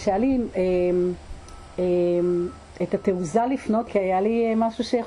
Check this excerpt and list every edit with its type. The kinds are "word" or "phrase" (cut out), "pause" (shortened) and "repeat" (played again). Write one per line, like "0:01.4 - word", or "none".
0:03.9 - word

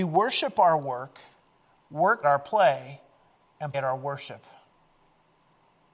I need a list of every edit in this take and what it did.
0:02.2 - word
0:03.7 - word

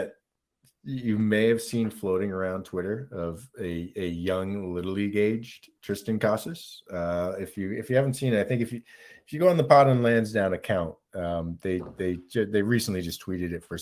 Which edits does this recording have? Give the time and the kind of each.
none

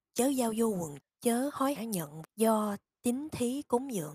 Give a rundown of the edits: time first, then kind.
0:01.0 - word
0:01.8 - word
0:02.2 - word

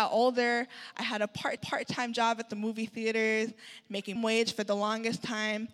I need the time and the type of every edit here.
0:01.6 - repeat
0:04.2 - word

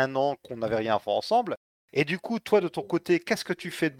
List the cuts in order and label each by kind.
none

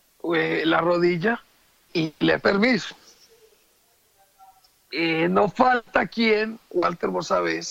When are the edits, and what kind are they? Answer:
0:01.9 - word
0:02.4 - word

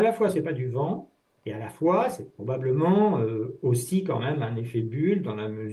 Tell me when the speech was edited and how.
none

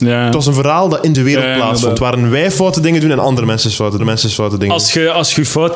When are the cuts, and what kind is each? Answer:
0:01.1 - word
0:04.0 - repeat

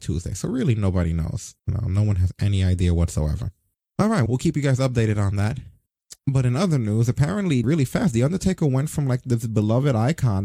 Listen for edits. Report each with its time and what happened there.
0:01.6 - pause
0:04.3 - word
0:06.2 - pause
0:07.6 - phrase

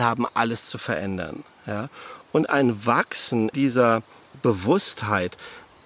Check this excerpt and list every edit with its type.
0:03.5 - word

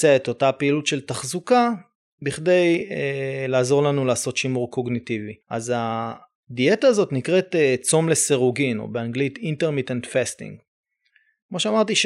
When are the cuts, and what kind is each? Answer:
0:05.4 - pause

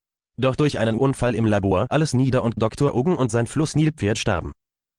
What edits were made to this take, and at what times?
0:01.9 - word

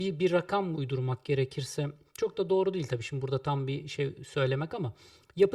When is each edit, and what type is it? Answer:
none

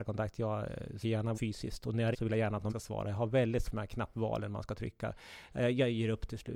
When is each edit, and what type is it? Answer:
0:01.0 - word
0:01.3 - word
0:02.1 - word
0:02.7 - word
0:03.6 - word

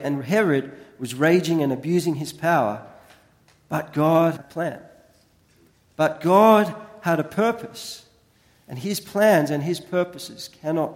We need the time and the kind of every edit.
0:04.4 - word

